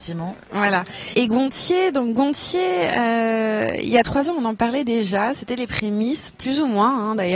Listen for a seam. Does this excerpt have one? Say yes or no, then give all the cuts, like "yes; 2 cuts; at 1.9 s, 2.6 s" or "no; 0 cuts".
no; 0 cuts